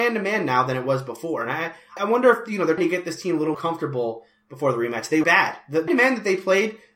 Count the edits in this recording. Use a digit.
5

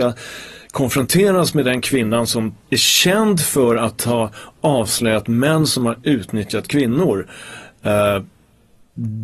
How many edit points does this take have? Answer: 1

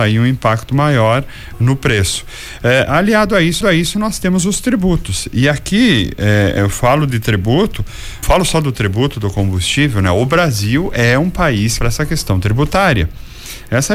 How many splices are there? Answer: 4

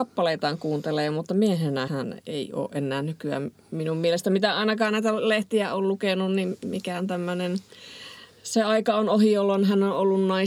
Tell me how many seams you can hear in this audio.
1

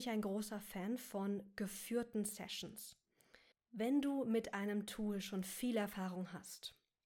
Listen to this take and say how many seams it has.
1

